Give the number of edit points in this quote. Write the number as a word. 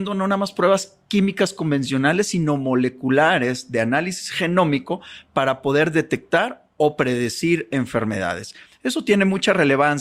zero